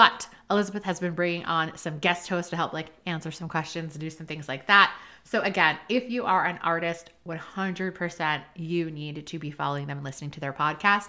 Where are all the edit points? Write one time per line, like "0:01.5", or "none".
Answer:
none